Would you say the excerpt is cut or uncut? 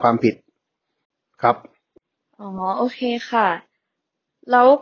uncut